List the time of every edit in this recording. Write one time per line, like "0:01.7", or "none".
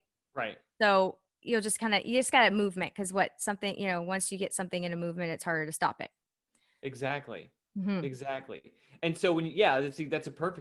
none